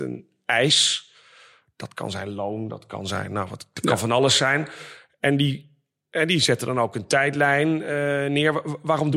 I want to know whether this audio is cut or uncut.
uncut